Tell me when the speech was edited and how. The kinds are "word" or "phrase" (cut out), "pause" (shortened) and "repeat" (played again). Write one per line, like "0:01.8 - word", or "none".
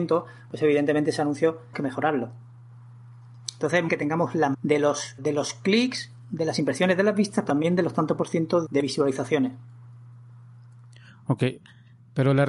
0:01.7 - word
0:03.9 - word
0:04.5 - word
0:05.2 - word
0:07.5 - word
0:08.7 - word